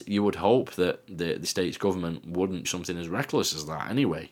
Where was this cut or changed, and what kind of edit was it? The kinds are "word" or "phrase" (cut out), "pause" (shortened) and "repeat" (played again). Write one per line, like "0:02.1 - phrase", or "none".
0:01.4 - word
0:02.6 - word